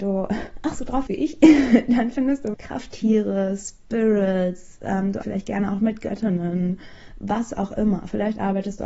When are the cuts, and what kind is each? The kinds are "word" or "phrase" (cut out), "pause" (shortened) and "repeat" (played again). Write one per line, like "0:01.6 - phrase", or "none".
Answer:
0:01.1 - word
0:02.5 - word
0:05.2 - word